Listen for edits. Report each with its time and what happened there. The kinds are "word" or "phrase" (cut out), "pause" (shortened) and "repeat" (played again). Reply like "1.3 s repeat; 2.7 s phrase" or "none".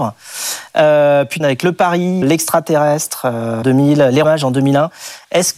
1.4 s word; 2.2 s word; 3.6 s word; 4.2 s word

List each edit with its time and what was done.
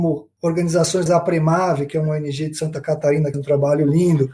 1.1 s word; 3.3 s word

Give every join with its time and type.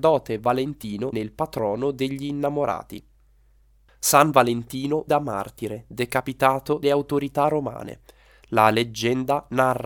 1.1 s word; 5.1 s word; 6.8 s word

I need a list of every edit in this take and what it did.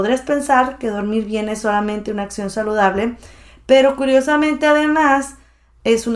none

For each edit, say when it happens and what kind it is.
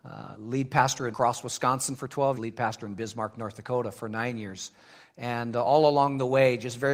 1.1 s word; 2.3 s phrase

